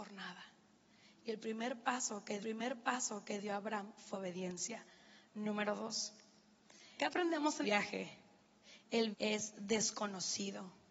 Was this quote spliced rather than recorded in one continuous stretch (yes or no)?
yes